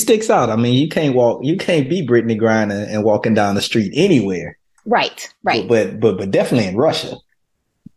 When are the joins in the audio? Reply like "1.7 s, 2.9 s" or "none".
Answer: none